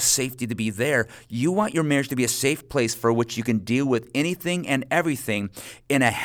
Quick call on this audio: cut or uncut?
uncut